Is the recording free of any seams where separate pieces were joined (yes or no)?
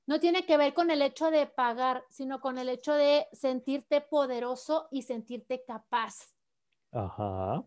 yes